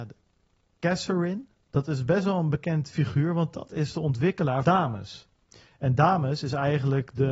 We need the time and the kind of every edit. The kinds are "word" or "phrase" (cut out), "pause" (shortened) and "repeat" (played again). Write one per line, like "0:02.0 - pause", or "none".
0:04.6 - word